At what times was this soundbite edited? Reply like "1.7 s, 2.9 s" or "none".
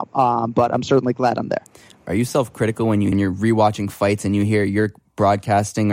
3.1 s